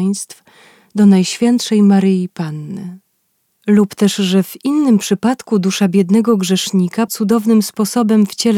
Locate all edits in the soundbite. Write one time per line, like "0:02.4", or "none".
0:07.1